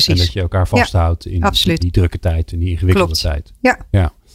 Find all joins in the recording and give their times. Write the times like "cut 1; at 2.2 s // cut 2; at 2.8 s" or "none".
cut 1; at 1.8 s